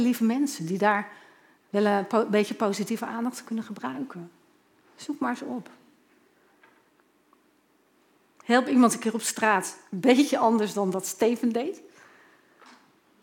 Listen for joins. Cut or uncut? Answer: uncut